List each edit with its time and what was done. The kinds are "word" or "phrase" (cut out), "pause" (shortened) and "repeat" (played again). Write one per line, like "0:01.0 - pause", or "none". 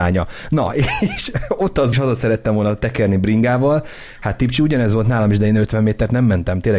0:01.9 - phrase